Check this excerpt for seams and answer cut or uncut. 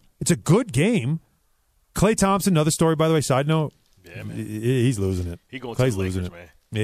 uncut